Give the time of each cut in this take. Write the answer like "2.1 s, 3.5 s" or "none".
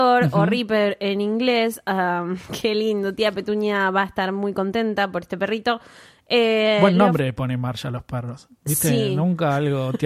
none